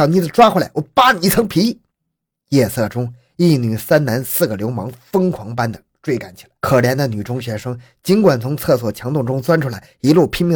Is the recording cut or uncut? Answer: cut